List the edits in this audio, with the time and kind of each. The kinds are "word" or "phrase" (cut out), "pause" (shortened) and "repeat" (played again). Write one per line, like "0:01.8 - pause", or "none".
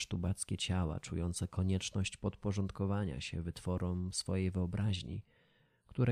none